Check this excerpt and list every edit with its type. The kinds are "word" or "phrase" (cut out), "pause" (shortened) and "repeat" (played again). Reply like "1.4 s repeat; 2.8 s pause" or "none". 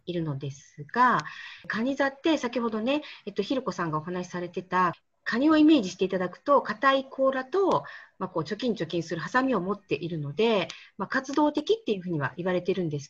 none